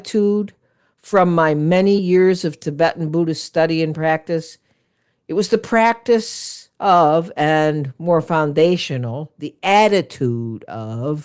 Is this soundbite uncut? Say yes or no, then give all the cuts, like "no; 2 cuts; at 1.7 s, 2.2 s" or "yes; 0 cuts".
yes; 0 cuts